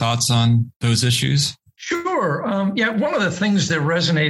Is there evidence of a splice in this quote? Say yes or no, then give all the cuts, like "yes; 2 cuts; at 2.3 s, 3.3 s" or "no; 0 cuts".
no; 0 cuts